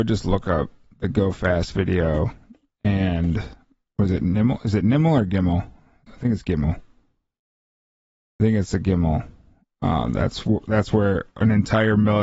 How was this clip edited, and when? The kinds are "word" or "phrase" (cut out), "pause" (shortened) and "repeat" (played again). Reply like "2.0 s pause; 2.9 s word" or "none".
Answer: none